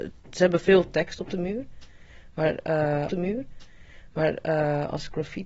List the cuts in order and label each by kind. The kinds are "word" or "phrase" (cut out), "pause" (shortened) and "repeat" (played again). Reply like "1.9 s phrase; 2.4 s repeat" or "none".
3.1 s repeat